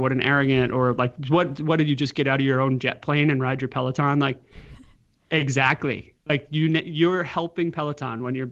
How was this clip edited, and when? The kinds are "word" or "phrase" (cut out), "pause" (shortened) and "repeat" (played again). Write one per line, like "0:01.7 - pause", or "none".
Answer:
none